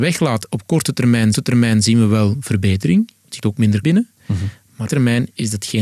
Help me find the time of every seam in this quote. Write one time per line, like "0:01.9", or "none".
0:01.3
0:03.4
0:03.8
0:04.9